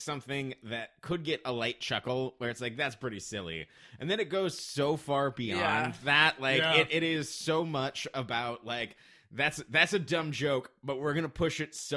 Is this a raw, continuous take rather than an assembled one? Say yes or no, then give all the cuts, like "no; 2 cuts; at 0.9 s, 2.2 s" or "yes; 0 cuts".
yes; 0 cuts